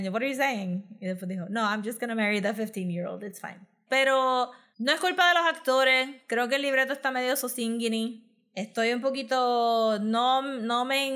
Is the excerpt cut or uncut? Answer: uncut